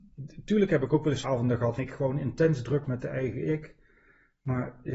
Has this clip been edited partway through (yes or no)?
yes